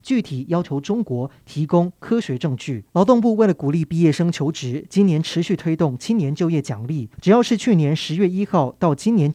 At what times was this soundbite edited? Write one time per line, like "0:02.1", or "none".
0:02.9
0:07.1